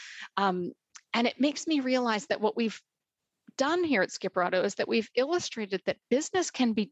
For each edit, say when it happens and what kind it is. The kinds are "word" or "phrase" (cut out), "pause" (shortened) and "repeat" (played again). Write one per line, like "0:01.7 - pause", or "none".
none